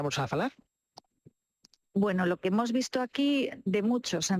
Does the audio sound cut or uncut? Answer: uncut